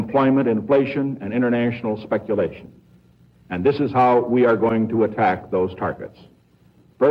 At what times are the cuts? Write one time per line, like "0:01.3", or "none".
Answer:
none